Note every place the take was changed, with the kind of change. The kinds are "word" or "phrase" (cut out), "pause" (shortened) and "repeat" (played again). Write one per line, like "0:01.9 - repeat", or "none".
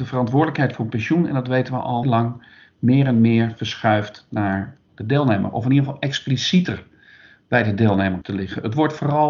0:02.0 - word
0:08.2 - word